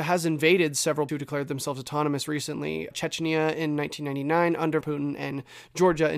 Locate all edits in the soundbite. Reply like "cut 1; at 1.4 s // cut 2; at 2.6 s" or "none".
cut 1; at 1.1 s // cut 2; at 2.9 s // cut 3; at 4.8 s